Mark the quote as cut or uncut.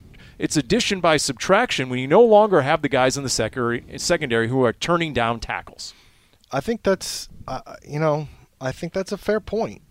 uncut